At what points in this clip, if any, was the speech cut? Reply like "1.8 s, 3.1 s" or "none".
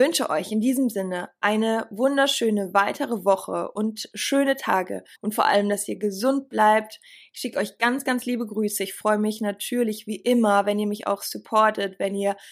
5.1 s